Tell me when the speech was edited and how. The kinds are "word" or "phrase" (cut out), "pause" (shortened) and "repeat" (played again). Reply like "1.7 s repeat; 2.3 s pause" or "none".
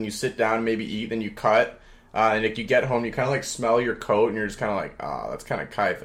none

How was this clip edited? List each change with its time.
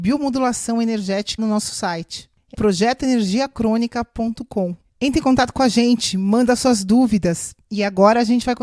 1.4 s phrase; 2.5 s phrase

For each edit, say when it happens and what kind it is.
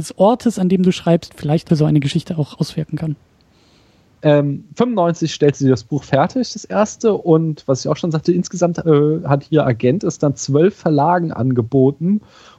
1.7 s phrase

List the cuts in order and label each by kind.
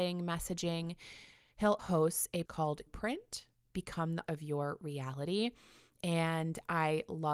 1.8 s word; 2.4 s word; 2.9 s word; 4.3 s word

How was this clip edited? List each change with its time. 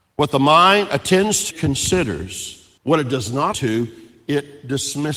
1.5 s phrase; 2.8 s pause; 3.5 s word

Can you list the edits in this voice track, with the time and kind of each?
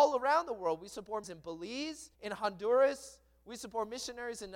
1.2 s word; 2.1 s pause

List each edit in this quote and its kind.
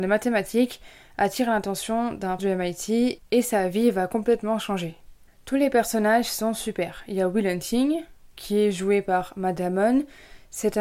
2.4 s word

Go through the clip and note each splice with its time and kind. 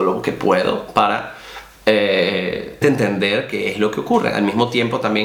2.8 s word

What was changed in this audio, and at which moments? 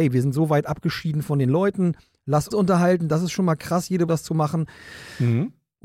2.5 s word; 4.1 s word

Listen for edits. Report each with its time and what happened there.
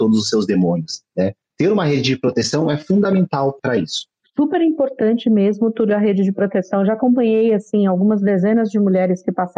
none

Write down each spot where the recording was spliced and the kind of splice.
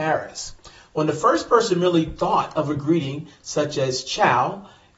none

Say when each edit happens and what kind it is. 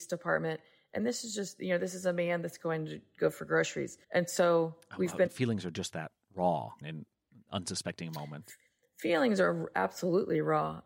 4.0 s pause; 5.3 s word; 6.8 s word

